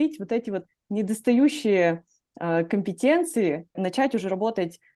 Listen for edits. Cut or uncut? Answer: cut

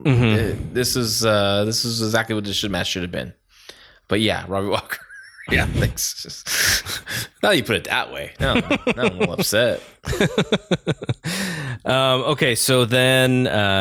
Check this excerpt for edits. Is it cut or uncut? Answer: uncut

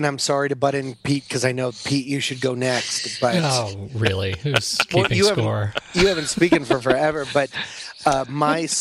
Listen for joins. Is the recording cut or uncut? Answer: uncut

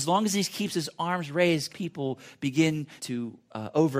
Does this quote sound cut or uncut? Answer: cut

